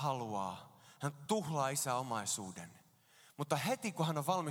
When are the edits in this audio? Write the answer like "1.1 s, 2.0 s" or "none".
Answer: none